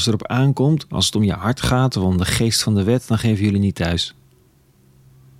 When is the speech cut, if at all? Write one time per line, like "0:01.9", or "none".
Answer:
none